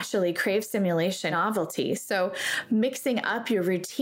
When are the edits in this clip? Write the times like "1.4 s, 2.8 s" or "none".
1.3 s

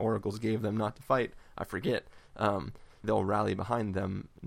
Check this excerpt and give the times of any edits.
3.0 s

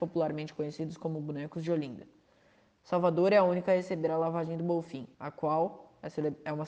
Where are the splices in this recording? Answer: 5.1 s

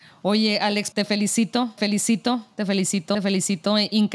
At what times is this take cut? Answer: 0.9 s, 1.8 s, 3.1 s

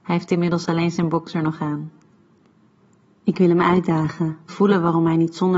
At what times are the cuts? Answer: 4.5 s

